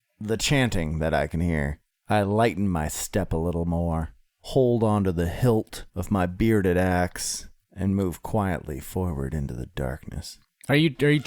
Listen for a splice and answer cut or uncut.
uncut